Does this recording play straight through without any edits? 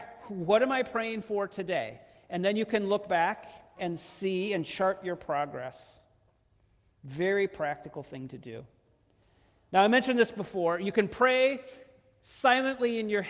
no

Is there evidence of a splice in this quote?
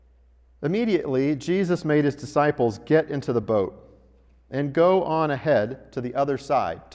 no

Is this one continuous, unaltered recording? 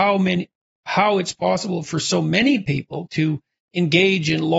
no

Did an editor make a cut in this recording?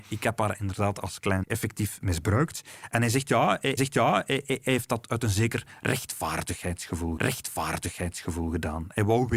yes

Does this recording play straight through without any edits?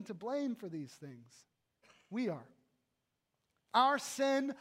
yes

